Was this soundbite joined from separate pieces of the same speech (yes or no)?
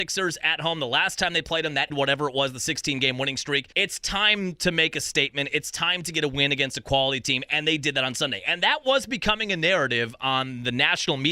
yes